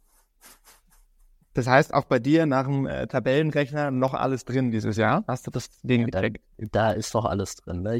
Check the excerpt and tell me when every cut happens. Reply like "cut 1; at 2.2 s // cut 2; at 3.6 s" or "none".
none

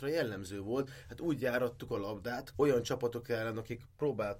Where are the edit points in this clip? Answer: cut 1; at 2.5 s

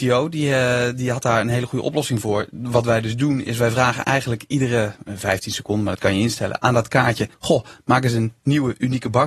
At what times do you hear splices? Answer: cut 1; at 7.3 s

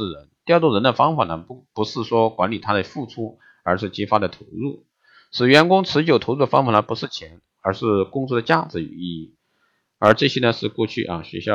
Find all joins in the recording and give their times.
none

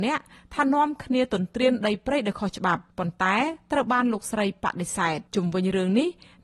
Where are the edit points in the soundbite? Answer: cut 1; at 2.9 s // cut 2; at 5.3 s

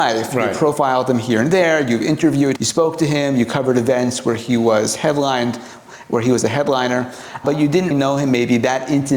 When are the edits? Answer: cut 1; at 2.6 s // cut 2; at 7.4 s // cut 3; at 7.9 s

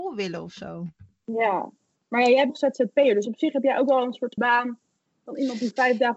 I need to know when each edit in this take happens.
cut 1; at 2.5 s // cut 2; at 4.4 s

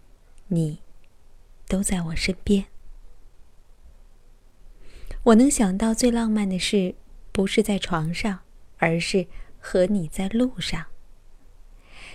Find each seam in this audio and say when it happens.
cut 1; at 8.7 s

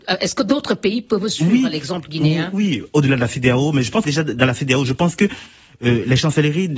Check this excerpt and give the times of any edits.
cut 1; at 2.5 s // cut 2; at 4.0 s

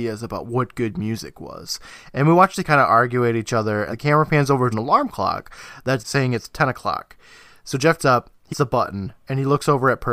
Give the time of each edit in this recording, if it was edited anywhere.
cut 1; at 2.6 s // cut 2; at 3.9 s // cut 3; at 4.7 s // cut 4; at 6.0 s // cut 5; at 8.0 s // cut 6; at 8.5 s

